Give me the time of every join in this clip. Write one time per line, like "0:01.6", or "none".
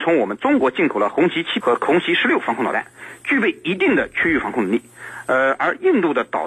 0:01.6